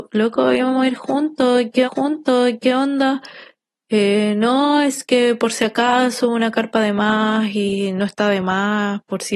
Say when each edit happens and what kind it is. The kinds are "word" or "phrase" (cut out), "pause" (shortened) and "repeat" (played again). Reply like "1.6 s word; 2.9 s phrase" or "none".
1.8 s repeat